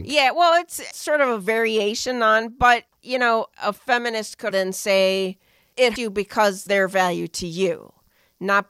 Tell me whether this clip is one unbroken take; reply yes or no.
no